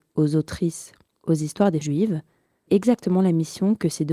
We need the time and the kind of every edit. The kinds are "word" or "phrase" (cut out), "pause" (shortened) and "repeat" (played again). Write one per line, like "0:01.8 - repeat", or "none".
0:01.1 - word
0:01.8 - word
0:02.7 - word